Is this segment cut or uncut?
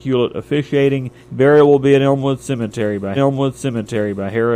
cut